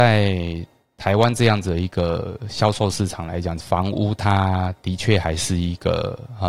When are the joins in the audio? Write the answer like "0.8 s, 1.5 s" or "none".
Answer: 3.6 s